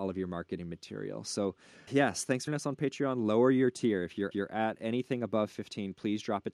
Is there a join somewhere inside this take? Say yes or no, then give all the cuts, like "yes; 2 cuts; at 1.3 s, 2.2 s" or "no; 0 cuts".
yes; 3 cuts; at 1.9 s, 2.5 s, 4.3 s